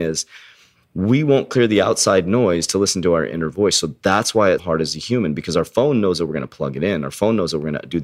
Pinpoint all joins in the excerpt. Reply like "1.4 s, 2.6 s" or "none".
4.6 s